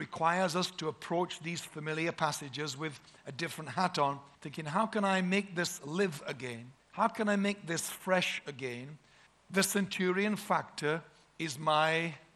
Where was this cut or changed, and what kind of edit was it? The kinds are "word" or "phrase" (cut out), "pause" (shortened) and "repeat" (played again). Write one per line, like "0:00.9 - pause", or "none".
0:04.3 - pause
0:06.8 - pause
0:09.3 - pause